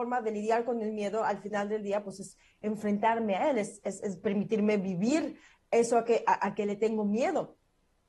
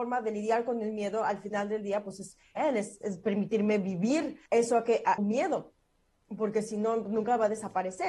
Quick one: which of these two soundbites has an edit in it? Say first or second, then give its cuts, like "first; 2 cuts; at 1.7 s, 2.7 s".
second; 4 cuts; at 2.6 s, 3.0 s, 4.5 s, 5.2 s